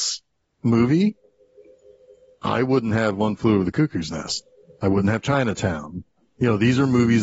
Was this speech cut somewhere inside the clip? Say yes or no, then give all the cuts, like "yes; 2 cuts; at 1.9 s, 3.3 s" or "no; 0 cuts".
no; 0 cuts